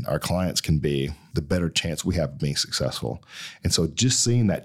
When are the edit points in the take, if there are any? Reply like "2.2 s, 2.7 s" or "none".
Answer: none